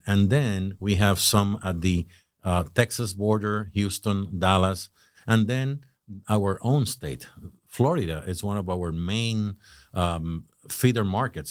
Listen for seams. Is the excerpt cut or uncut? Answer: uncut